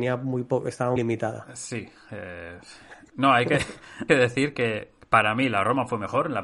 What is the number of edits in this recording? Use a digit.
2